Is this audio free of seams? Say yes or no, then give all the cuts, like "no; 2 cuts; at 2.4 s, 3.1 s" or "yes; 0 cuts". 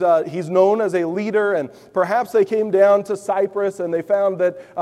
yes; 0 cuts